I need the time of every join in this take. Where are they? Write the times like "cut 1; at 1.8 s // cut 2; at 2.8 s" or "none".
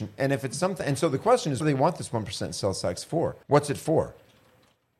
cut 1; at 1.6 s // cut 2; at 3.4 s